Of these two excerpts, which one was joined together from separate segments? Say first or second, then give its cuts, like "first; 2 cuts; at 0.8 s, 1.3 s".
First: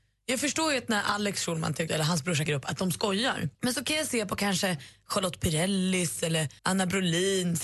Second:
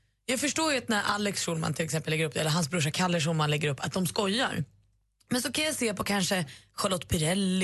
first; 4 cuts; at 1.9 s, 2.5 s, 3.5 s, 6.6 s